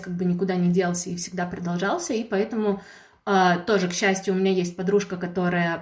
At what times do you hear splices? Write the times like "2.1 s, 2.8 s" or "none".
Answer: none